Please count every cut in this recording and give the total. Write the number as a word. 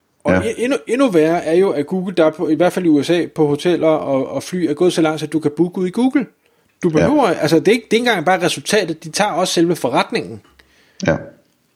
zero